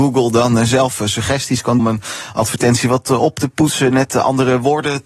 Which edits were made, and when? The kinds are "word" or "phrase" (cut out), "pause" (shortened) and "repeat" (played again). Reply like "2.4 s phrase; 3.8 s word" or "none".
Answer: 1.8 s phrase

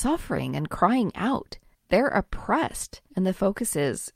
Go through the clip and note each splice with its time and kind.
1.7 s pause; 3.1 s pause

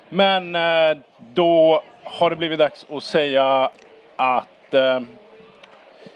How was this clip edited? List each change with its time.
none

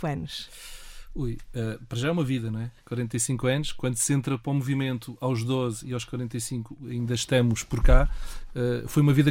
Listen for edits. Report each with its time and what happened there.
none

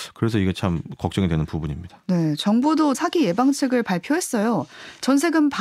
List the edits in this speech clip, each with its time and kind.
2.9 s word

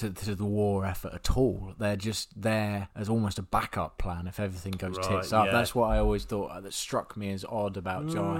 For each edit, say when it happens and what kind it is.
2.9 s pause

